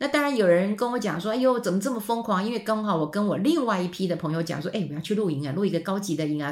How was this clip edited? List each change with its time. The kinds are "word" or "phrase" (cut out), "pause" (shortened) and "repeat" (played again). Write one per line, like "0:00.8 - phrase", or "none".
none